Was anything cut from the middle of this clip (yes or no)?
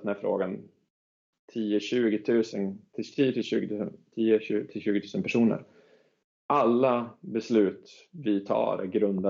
no